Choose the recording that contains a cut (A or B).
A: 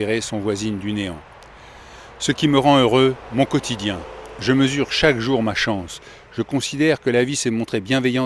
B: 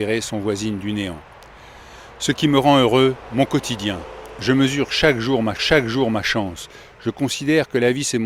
B